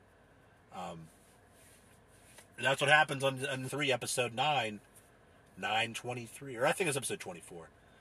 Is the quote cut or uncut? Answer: cut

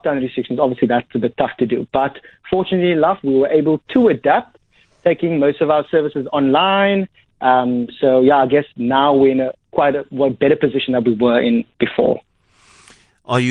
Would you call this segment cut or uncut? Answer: uncut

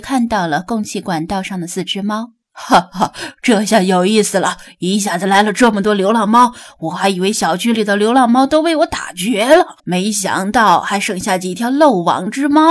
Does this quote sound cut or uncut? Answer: cut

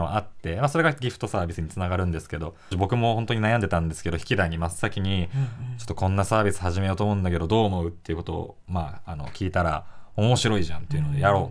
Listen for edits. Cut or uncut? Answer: cut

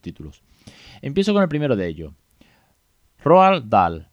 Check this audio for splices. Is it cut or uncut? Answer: uncut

